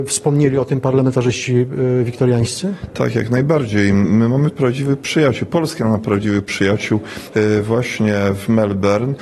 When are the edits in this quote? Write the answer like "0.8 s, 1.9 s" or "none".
4.5 s